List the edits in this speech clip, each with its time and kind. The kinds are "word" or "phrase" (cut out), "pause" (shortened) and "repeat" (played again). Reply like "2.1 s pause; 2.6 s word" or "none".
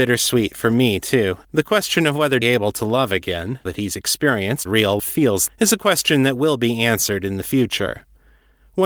1.4 s pause; 2.4 s phrase; 3.7 s word; 4.7 s word; 5.0 s word; 5.5 s word